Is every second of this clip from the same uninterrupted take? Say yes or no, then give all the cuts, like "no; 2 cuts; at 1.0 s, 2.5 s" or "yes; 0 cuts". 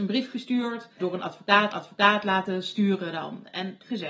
no; 2 cuts; at 1.0 s, 1.7 s